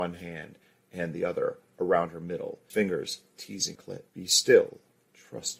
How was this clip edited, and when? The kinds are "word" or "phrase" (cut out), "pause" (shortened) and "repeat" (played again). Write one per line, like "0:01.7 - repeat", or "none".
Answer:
0:02.7 - word
0:03.7 - word
0:04.1 - pause